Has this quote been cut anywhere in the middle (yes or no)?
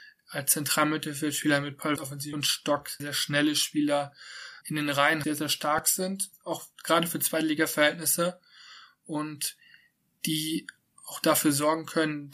yes